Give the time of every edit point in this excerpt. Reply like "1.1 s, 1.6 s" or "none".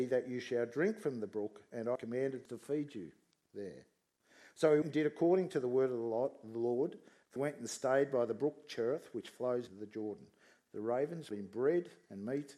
2.0 s, 2.5 s, 4.8 s, 7.4 s, 9.7 s, 11.3 s